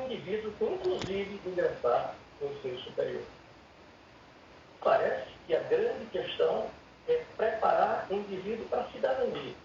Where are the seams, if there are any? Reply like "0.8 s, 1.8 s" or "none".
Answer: 1.4 s, 4.8 s